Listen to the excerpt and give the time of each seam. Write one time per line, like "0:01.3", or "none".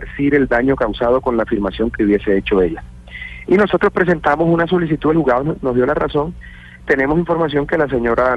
0:02.0
0:06.8

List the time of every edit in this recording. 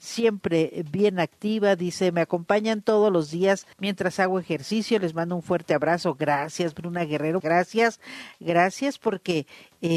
0:03.7
0:07.4

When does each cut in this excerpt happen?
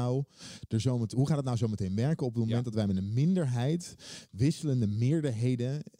none

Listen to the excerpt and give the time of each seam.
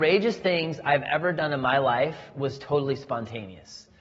none

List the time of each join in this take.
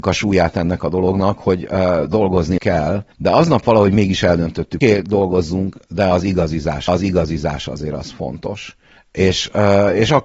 0:02.6
0:03.1
0:04.8
0:06.9
0:09.0

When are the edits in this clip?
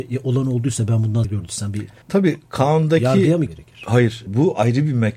0:01.2
0:02.0
0:03.5
0:04.3

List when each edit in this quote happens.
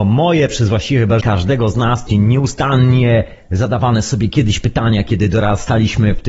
0:01.2
0:02.1

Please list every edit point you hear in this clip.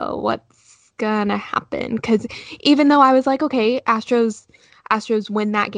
none

